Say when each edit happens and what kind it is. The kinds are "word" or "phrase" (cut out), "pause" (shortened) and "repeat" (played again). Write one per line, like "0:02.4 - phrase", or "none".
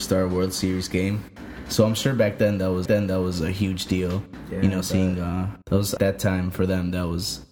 0:02.9 - repeat
0:05.6 - pause
0:06.0 - phrase